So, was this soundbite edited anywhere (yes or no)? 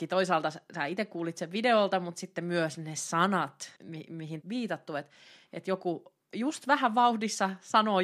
yes